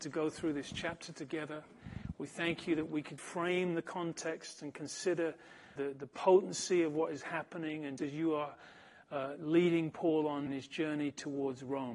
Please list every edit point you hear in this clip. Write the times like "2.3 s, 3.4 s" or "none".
3.2 s, 5.8 s, 8.0 s, 10.5 s